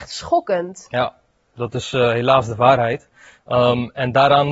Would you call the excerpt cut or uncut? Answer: uncut